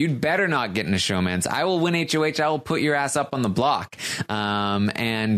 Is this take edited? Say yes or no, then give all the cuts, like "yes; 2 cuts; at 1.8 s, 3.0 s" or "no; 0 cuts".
no; 0 cuts